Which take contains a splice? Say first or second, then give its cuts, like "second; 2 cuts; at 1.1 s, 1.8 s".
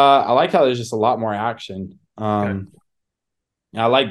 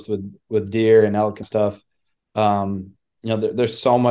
second; 1 cut; at 1.4 s